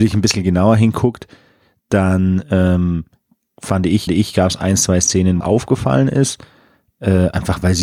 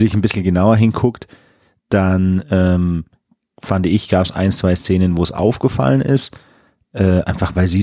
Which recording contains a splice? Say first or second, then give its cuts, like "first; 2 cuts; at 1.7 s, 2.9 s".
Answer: first; 2 cuts; at 4.1 s, 5.4 s